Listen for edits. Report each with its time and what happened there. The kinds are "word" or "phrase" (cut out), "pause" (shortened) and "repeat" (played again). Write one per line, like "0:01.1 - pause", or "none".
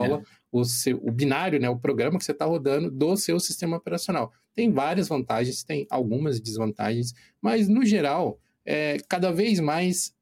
0:01.0 - word